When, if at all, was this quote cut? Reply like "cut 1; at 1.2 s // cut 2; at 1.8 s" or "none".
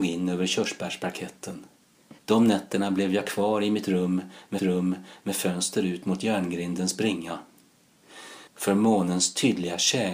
cut 1; at 2.2 s // cut 2; at 4.6 s // cut 3; at 8.5 s